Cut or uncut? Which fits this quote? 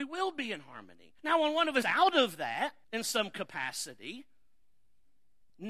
cut